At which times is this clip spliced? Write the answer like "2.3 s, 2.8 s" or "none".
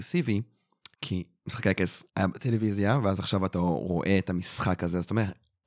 0.9 s, 2.1 s